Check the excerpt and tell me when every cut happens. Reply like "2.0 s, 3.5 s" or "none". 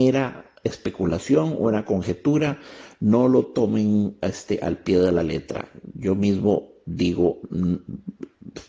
none